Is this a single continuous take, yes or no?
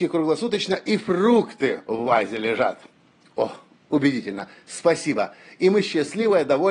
yes